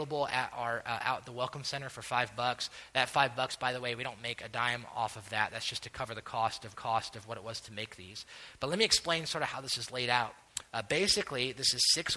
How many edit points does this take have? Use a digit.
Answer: 1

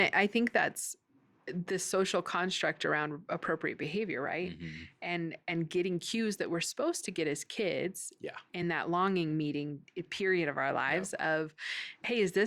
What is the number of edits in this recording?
0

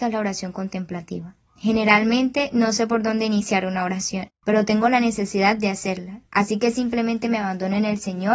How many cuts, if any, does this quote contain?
0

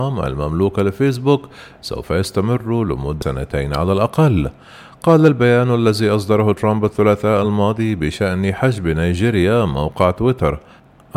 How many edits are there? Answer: 0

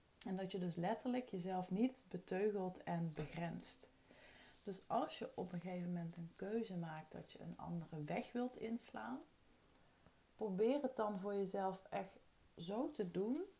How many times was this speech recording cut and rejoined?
1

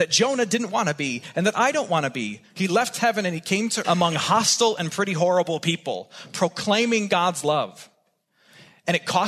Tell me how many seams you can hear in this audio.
2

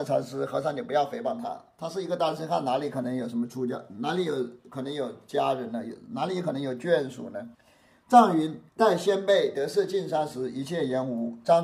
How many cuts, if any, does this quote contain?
2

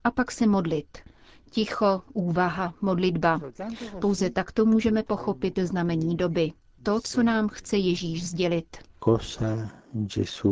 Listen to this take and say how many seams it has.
0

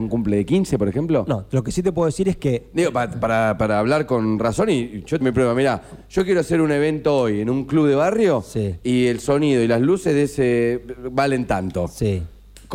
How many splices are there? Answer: 1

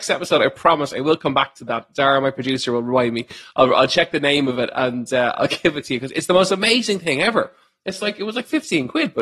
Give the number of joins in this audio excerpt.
0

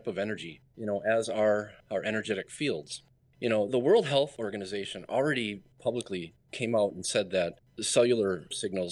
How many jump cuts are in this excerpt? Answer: 2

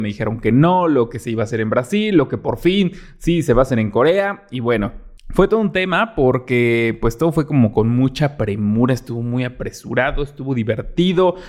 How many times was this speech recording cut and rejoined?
1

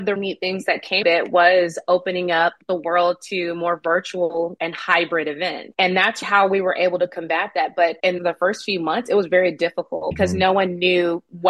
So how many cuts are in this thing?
1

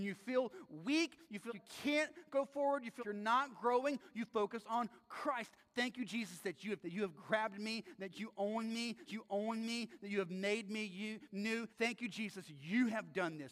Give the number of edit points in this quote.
5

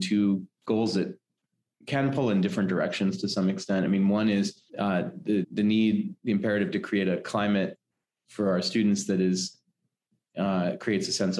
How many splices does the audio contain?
2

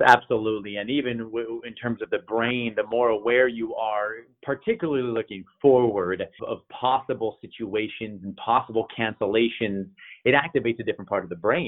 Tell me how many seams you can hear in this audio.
1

